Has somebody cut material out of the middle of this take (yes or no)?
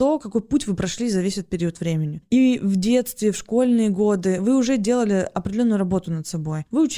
no